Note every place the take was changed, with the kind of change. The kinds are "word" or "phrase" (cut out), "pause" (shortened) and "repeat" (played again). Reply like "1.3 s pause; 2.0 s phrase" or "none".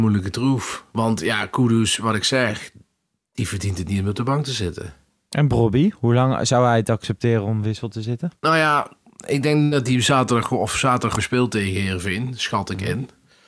11.2 s word